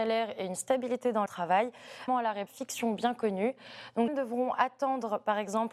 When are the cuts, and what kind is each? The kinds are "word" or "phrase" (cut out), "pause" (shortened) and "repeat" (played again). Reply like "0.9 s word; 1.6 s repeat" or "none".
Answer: 1.3 s word; 2.1 s phrase; 2.5 s word; 4.1 s phrase